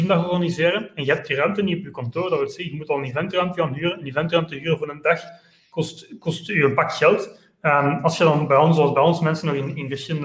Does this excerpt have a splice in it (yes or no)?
no